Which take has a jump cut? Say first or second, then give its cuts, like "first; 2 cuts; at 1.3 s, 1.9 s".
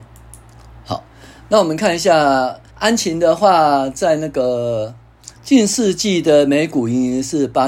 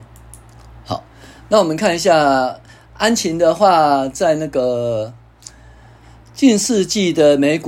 first; 2 cuts; at 2.7 s, 5.3 s